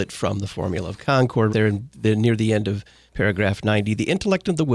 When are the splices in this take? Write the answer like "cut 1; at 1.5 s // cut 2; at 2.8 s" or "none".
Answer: cut 1; at 1.5 s